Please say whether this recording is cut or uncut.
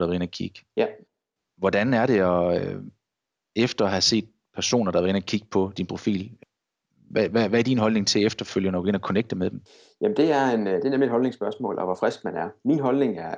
uncut